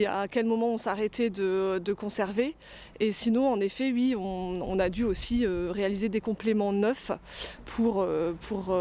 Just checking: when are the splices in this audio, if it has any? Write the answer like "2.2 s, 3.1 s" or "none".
none